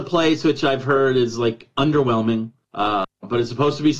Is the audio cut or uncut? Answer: cut